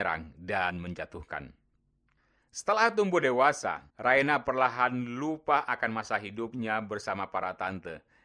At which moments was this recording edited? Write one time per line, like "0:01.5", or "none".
0:03.9